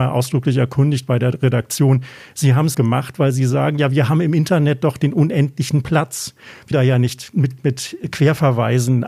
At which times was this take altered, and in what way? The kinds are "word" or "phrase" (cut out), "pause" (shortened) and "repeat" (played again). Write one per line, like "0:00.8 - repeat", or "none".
0:02.7 - word
0:06.7 - word
0:07.6 - word